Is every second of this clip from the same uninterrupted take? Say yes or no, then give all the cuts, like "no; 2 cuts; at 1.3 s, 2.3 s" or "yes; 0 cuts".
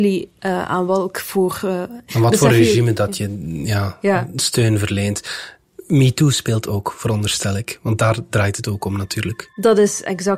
yes; 0 cuts